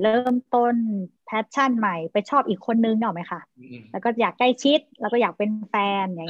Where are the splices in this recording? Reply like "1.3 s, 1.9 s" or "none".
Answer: 1.2 s